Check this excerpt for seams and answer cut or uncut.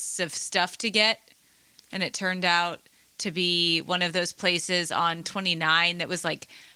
uncut